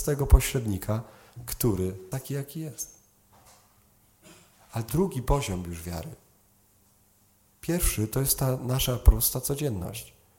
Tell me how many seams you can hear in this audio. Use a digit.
2